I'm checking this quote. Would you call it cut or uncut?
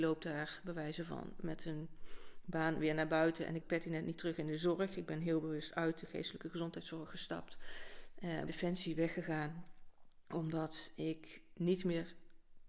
cut